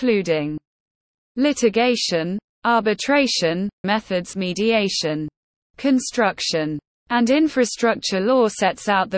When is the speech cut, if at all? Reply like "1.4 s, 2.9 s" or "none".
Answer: 3.8 s, 4.3 s